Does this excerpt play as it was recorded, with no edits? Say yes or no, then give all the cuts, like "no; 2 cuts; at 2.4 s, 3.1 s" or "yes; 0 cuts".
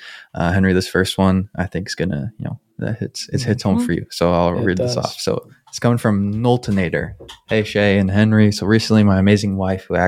yes; 0 cuts